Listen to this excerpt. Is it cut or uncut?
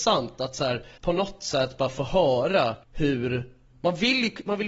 cut